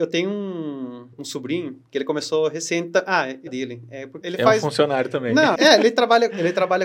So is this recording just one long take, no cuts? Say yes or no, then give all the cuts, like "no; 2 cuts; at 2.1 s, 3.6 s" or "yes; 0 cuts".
no; 4 cuts; at 1.1 s, 3.5 s, 4.2 s, 5.6 s